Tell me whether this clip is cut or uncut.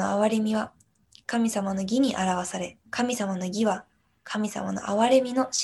cut